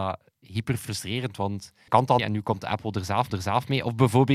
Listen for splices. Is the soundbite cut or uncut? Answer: cut